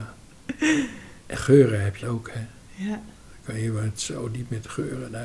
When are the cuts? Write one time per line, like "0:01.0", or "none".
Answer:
0:01.3
0:02.0
0:03.9